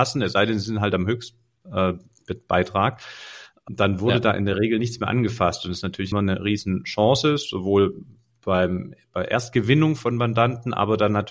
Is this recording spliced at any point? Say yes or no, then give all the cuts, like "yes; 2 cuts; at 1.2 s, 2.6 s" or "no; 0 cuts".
yes; 2 cuts; at 3.7 s, 6.1 s